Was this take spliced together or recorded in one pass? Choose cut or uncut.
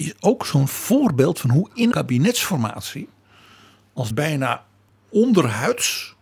cut